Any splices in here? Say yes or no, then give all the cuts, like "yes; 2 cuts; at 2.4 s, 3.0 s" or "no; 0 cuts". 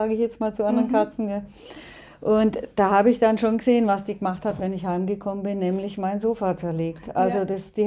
no; 0 cuts